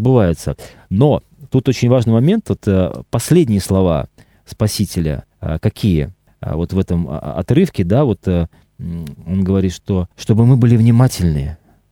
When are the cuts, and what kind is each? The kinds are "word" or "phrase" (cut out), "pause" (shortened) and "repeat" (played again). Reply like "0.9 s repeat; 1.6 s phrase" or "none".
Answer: 5.3 s pause; 6.3 s pause; 10.1 s pause